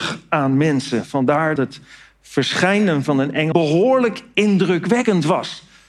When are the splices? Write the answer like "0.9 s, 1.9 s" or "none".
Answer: 1.6 s, 3.0 s, 3.5 s